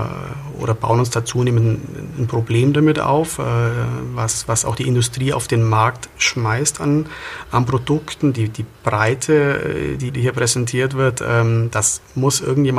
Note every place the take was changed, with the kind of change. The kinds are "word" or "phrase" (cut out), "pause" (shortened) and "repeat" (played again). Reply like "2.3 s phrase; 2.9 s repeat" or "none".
10.1 s word